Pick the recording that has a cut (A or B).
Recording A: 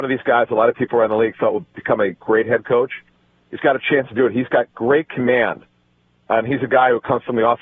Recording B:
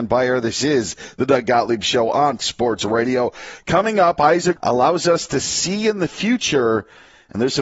B